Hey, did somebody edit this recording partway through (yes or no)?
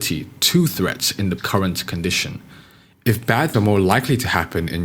yes